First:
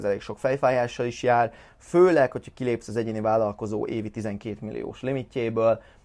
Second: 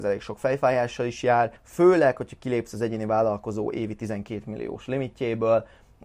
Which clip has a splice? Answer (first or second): second